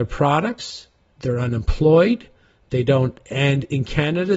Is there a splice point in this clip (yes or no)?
yes